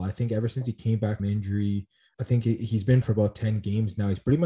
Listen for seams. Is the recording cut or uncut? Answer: cut